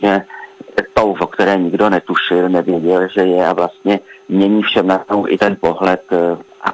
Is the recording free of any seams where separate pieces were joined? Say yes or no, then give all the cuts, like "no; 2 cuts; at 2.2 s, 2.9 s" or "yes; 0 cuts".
no; 1 cut; at 1.1 s